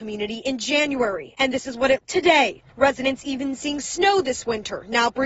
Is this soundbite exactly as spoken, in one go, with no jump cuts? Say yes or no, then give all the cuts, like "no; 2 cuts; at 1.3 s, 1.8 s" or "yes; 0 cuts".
no; 2 cuts; at 2.0 s, 2.7 s